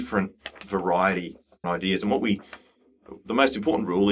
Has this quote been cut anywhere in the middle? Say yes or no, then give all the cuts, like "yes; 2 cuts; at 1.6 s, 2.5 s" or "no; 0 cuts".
yes; 1 cut; at 1.6 s